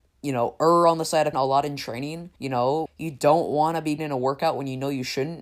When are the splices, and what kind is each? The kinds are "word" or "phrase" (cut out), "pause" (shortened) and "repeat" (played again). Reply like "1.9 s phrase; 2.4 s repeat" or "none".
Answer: 1.3 s word; 2.4 s pause; 2.9 s word; 4.0 s word